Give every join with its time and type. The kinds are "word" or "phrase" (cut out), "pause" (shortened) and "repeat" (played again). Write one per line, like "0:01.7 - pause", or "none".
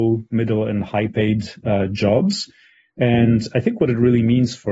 none